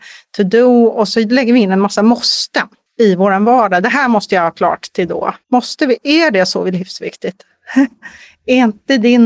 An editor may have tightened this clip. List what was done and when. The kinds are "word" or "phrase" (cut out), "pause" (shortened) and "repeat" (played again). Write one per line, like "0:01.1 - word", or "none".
0:05.4 - pause